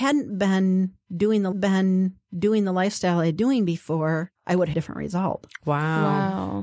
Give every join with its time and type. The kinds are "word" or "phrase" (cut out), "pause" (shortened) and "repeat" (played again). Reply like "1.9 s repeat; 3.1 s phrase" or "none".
1.5 s repeat; 3.4 s word; 4.4 s pause; 4.7 s phrase

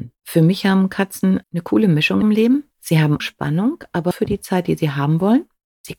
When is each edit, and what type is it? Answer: 1.4 s word; 2.2 s phrase; 2.7 s pause; 3.2 s word; 4.1 s word

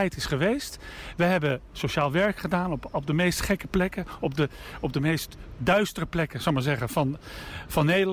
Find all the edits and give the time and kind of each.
none

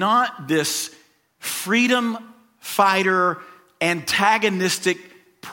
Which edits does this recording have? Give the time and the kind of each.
none

